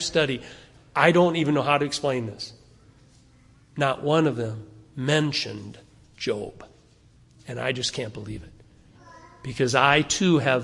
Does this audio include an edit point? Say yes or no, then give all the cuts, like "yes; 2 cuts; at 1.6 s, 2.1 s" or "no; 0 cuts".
no; 0 cuts